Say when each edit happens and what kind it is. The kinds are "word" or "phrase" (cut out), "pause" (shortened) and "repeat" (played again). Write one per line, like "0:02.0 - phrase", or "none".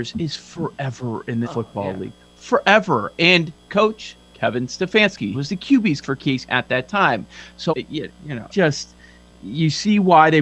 0:01.4 - word
0:03.7 - word
0:05.3 - word
0:06.0 - word
0:06.5 - word
0:07.7 - word
0:08.5 - word